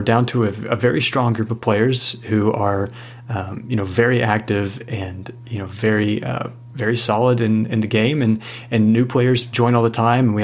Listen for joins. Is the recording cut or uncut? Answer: uncut